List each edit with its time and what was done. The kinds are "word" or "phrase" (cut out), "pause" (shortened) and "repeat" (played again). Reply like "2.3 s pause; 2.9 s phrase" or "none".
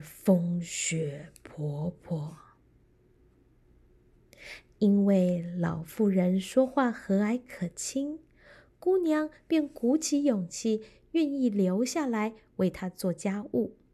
none